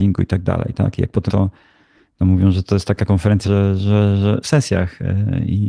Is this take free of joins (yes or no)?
no